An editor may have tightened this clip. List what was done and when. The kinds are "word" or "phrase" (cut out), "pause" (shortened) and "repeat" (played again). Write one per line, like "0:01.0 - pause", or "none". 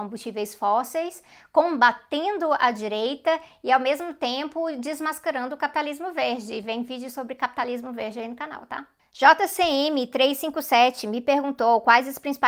none

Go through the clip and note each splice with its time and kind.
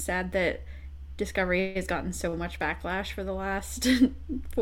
none

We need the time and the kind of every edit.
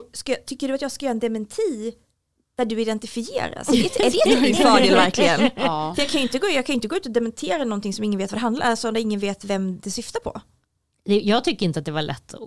none

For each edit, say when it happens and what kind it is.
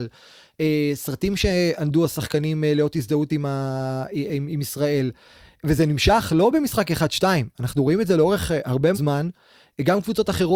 0:08.9 - word

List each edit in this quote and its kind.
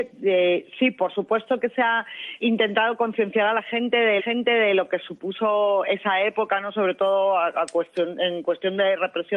0:02.4 - word
0:04.2 - repeat

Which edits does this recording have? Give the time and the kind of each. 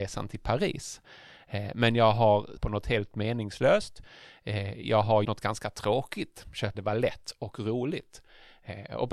0:02.6 - phrase
0:05.2 - word
0:06.7 - phrase

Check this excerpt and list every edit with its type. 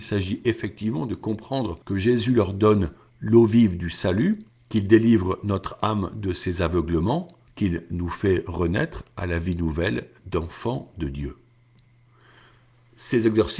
0:01.8 - pause
0:04.5 - pause
0:07.5 - pause

